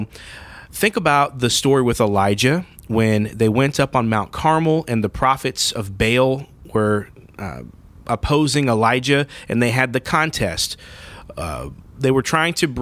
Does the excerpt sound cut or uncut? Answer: uncut